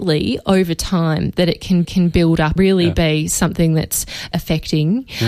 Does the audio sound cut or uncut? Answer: cut